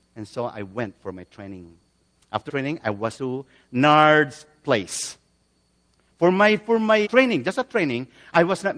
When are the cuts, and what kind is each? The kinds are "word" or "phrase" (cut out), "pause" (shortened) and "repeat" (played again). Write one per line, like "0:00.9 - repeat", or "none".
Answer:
0:02.5 - word
0:03.1 - word
0:07.0 - word